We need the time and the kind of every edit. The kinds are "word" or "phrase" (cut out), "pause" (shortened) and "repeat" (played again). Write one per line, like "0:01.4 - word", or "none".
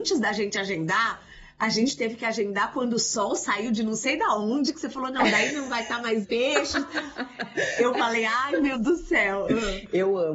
0:06.2 - word
0:08.7 - word